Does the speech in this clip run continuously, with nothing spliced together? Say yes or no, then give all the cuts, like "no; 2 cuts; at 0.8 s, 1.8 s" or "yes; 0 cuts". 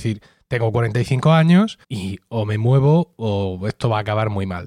no; 1 cut; at 1.8 s